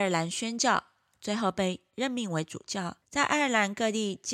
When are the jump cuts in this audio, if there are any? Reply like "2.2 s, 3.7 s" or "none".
3.0 s